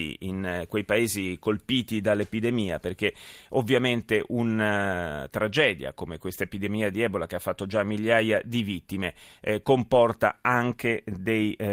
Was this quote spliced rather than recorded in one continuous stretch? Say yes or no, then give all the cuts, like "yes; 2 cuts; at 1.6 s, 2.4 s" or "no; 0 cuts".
no; 0 cuts